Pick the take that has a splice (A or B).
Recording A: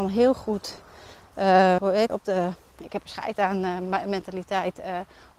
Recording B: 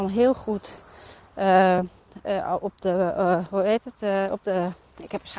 A